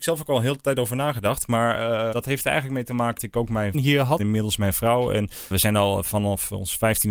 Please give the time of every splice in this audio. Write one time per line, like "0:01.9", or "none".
0:02.1
0:03.2
0:03.7
0:04.2
0:05.5